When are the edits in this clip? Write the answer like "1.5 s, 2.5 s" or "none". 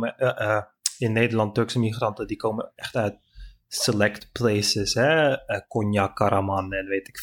none